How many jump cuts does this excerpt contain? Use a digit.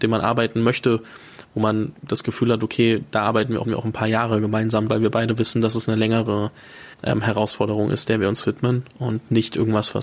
3